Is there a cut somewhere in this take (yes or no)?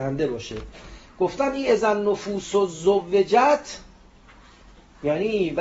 no